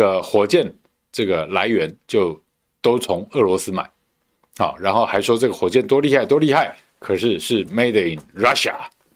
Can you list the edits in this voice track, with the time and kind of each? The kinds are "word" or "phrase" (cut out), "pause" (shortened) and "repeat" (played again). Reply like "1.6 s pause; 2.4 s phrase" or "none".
none